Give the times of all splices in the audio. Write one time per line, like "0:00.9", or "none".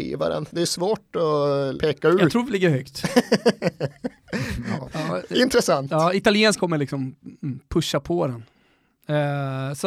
0:01.8
0:02.5
0:04.8
0:06.6